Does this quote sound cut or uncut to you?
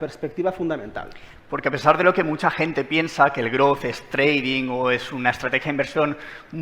uncut